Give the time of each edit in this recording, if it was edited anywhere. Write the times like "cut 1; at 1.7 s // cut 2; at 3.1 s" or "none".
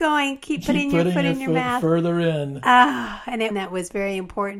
cut 1; at 3.5 s